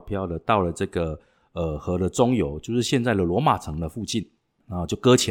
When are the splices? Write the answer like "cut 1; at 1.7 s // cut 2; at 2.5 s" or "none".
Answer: none